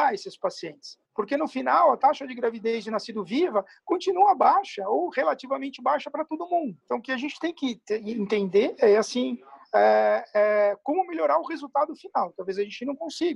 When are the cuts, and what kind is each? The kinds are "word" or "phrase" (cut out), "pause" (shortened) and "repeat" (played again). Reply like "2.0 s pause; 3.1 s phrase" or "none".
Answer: 1.0 s pause; 6.8 s pause